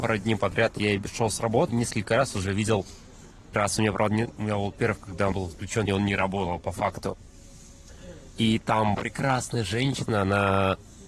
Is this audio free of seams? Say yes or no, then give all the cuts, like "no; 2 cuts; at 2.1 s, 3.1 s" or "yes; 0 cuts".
no; 6 cuts; at 1.7 s, 3.5 s, 4.3 s, 5.3 s, 5.9 s, 8.9 s